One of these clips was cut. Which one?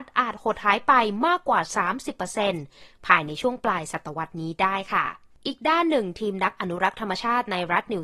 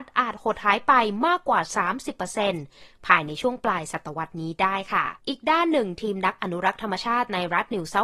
second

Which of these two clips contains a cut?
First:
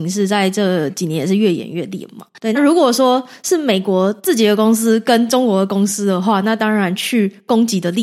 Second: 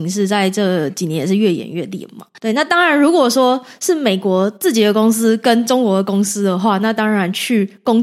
first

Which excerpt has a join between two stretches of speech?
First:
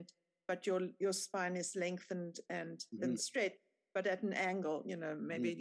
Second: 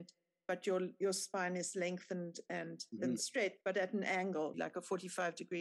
second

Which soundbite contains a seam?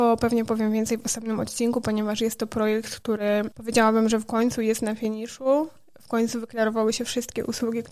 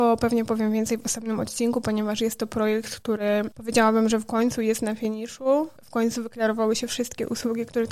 second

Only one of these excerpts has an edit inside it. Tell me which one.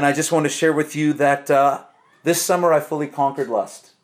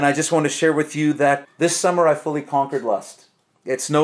second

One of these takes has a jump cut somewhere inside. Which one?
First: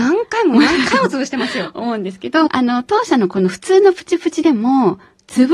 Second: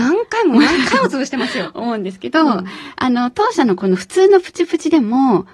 first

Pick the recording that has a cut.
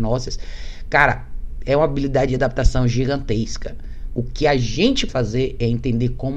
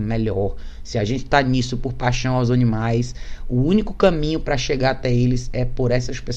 first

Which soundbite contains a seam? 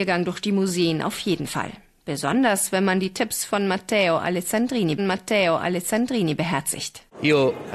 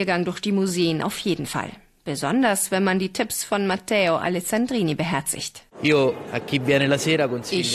first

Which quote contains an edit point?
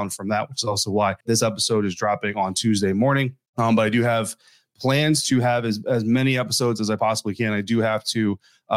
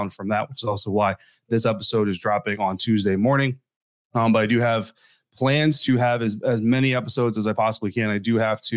first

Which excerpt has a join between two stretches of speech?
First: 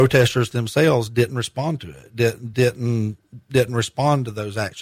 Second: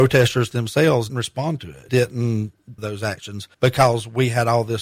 second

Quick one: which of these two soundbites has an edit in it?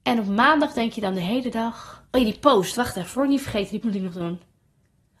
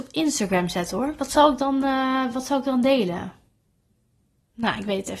first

